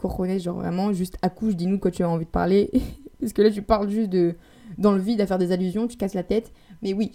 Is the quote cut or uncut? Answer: uncut